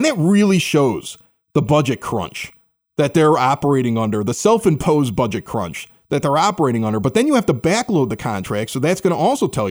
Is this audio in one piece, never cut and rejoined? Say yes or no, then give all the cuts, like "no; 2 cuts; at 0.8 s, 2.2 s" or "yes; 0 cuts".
yes; 0 cuts